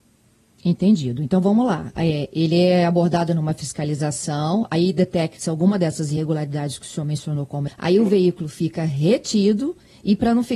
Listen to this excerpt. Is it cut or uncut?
cut